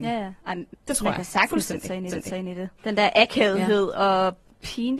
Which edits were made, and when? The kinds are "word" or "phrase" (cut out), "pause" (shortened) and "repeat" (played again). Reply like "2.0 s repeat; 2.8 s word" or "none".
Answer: 2.1 s repeat; 2.8 s pause